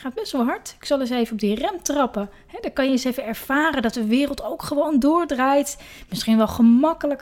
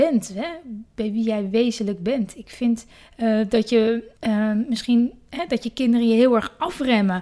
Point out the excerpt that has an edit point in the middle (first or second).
second